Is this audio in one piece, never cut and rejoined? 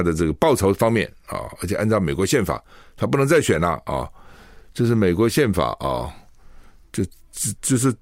yes; 0 cuts

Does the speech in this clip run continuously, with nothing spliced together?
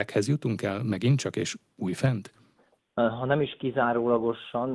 no; 1 cut; at 2.5 s

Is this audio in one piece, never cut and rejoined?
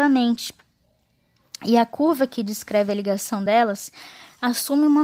yes; 0 cuts

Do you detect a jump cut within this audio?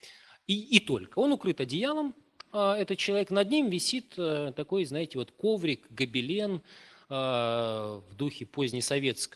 no; 0 cuts

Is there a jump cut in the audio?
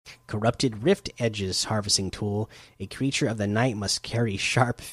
no; 0 cuts

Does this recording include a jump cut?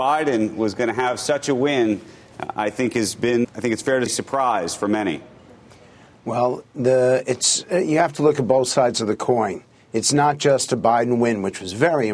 yes; 2 cuts; at 3.4 s, 4.1 s

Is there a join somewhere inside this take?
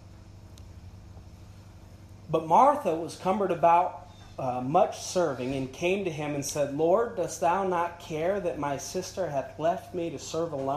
no; 0 cuts

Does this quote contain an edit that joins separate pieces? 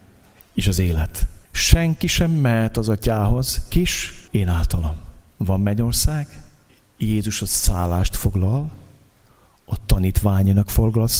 yes; 5 cuts; at 1.4 s, 3.7 s, 4.3 s, 5.3 s, 6.7 s

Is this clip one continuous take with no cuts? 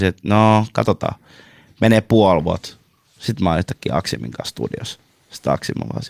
yes; 0 cuts

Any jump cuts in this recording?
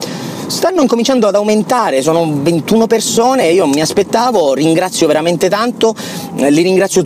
no; 0 cuts

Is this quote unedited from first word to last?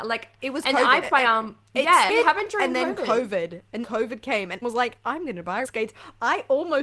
no; 5 cuts; at 1.0 s, 2.1 s, 3.8 s, 4.6 s, 5.6 s

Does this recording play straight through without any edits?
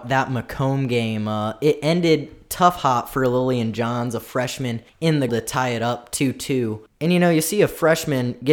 no; 2 cuts; at 4.9 s, 5.3 s

